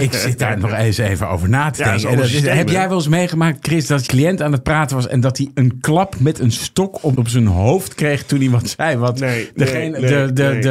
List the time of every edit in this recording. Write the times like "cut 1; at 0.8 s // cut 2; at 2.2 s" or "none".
cut 1; at 4.1 s // cut 2; at 7.1 s